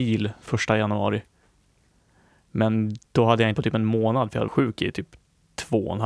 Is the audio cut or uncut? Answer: cut